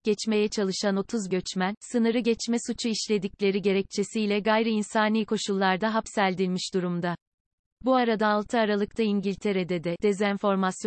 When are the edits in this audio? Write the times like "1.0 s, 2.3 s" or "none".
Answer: 1.3 s